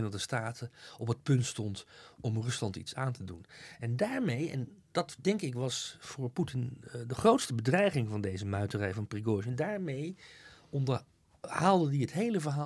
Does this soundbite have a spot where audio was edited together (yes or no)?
no